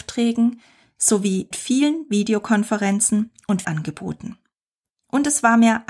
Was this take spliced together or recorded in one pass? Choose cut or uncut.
cut